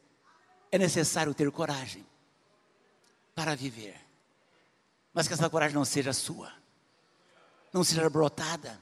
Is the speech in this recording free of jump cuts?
yes; 0 cuts

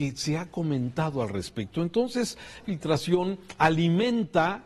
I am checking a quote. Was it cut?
yes; 1 cut; at 2.6 s

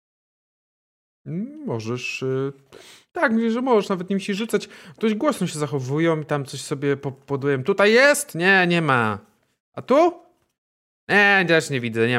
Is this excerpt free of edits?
yes; 0 cuts

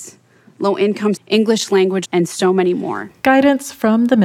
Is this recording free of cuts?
no; 2 cuts; at 1.2 s, 2.1 s

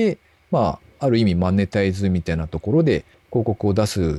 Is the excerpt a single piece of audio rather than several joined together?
no; 1 cut; at 3.1 s

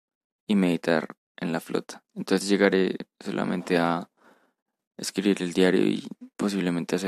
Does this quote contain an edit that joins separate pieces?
yes; 1 cut; at 2.1 s

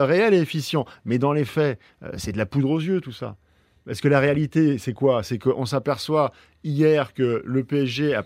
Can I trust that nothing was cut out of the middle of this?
yes; 0 cuts

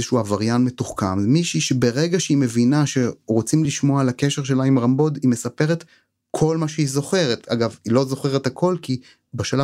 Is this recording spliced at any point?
no; 0 cuts

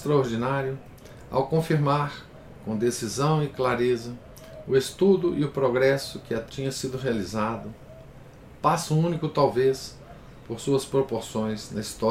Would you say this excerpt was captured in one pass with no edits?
no; 1 cut; at 6.5 s

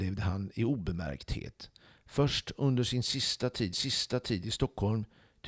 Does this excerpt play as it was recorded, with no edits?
no; 1 cut; at 3.7 s

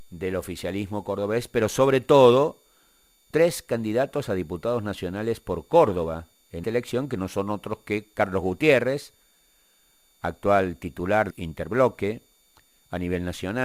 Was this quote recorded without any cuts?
no; 3 cuts; at 3.3 s, 6.6 s, 11.3 s

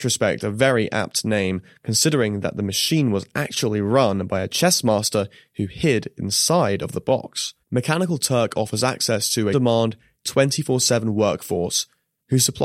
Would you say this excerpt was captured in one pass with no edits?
no; 2 cuts; at 7.6 s, 9.5 s

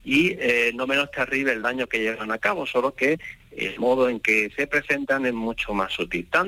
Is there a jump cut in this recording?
no; 0 cuts

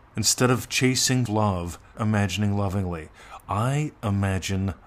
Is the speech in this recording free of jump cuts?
no; 2 cuts; at 1.3 s, 1.9 s

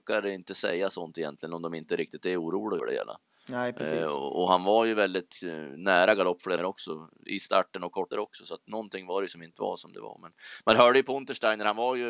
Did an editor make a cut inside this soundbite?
yes; 4 cuts; at 2.8 s, 6.6 s, 8.1 s, 9.5 s

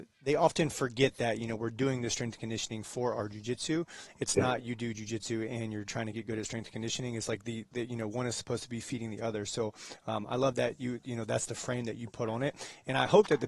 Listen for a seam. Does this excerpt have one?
no; 0 cuts

